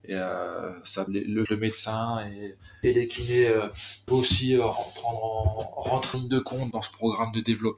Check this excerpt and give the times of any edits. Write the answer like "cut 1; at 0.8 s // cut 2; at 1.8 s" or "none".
cut 1; at 1.1 s // cut 2; at 1.5 s // cut 3; at 2.8 s // cut 4; at 4.1 s // cut 5; at 6.1 s // cut 6; at 6.7 s